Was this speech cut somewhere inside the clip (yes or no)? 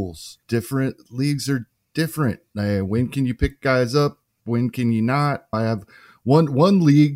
no